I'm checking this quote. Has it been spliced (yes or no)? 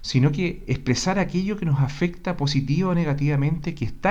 no